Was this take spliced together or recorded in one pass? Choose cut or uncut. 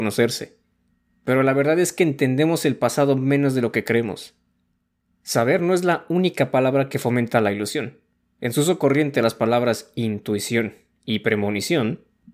uncut